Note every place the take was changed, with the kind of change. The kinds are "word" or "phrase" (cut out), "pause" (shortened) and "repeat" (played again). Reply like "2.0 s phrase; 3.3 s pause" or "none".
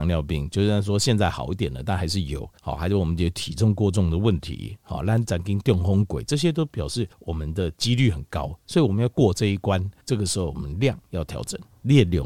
2.6 s pause; 7.1 s pause; 10.0 s pause